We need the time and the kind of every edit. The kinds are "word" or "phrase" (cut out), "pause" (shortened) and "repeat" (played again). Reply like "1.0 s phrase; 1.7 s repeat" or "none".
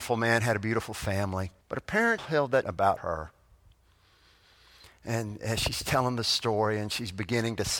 1.6 s pause; 2.2 s word; 2.6 s word; 3.0 s phrase